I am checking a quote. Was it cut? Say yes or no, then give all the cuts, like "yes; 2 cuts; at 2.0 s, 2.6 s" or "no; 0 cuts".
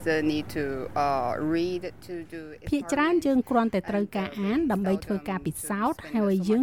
no; 0 cuts